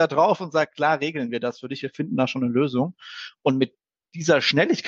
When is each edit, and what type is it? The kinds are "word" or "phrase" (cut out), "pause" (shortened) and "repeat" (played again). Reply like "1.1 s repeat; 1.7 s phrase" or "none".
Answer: none